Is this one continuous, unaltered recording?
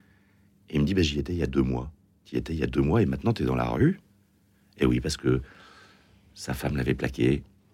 yes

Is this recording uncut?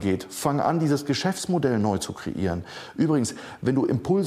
yes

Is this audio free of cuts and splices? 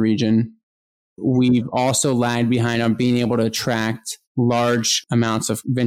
no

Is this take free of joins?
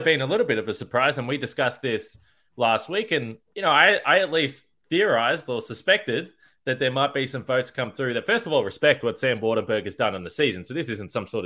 no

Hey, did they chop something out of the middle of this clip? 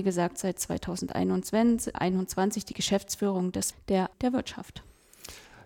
yes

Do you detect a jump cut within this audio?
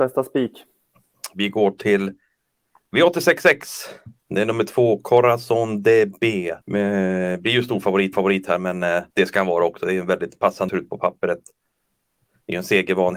yes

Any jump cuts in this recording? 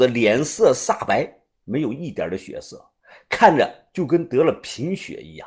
no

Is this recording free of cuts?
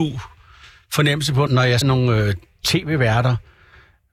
no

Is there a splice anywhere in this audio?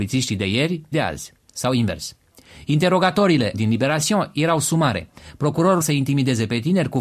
yes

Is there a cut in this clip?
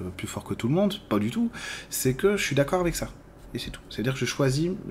no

